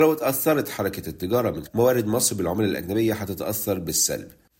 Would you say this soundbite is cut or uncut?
cut